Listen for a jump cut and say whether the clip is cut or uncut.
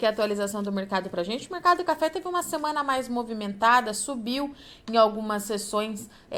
uncut